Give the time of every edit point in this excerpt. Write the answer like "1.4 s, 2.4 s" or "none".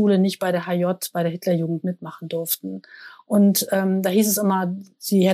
none